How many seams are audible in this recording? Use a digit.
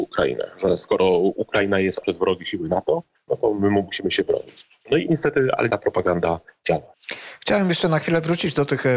2